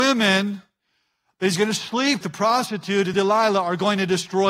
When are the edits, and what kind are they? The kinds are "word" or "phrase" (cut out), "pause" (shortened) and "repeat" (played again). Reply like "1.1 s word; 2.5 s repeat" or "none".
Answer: 2.2 s word; 3.1 s word